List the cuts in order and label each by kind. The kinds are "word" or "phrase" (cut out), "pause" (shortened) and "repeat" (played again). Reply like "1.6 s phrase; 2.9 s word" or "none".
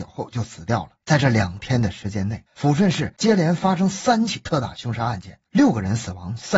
1.0 s pause; 2.5 s pause; 5.5 s pause